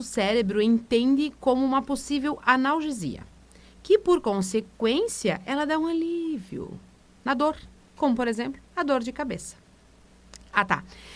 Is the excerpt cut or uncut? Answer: uncut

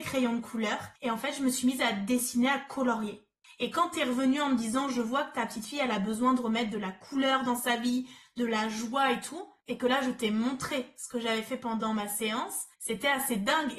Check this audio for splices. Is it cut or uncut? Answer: cut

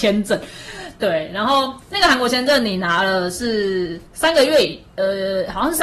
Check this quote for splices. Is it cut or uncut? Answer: cut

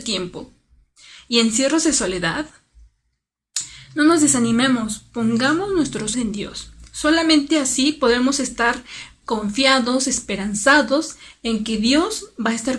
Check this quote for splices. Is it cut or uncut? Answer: cut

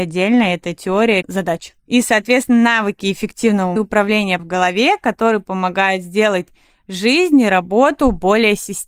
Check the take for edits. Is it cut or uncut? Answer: cut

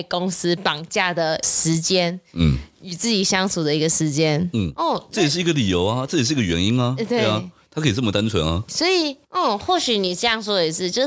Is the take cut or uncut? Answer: cut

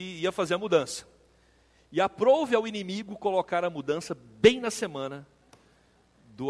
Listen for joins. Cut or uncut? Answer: uncut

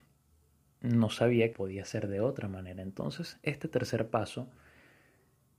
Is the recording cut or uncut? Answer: cut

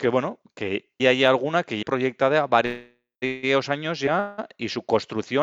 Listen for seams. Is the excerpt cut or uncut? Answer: cut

